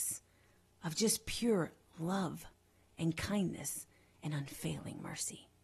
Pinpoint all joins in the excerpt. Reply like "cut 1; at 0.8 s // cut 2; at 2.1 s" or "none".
none

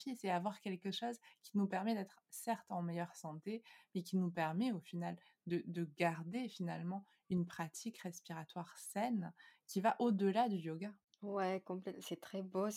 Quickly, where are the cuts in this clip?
none

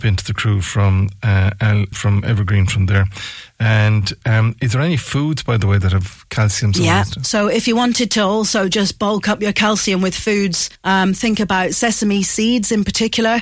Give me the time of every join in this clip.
cut 1; at 1.9 s // cut 2; at 10.8 s

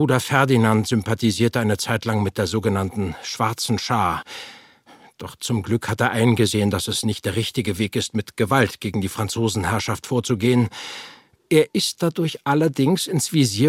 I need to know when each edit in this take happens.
none

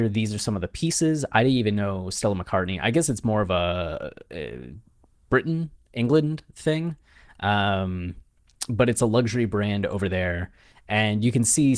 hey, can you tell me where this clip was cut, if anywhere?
none

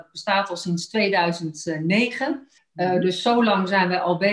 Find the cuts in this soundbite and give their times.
cut 1; at 2.6 s

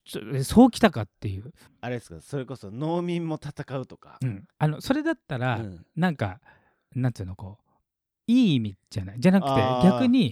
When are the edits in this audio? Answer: cut 1; at 1.7 s // cut 2; at 4.5 s

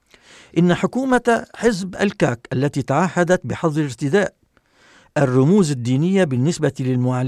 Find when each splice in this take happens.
none

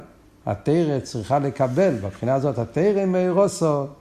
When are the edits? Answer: none

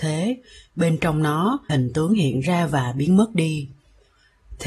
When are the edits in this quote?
cut 1; at 1.7 s

